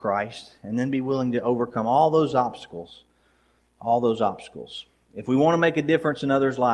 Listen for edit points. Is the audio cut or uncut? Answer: uncut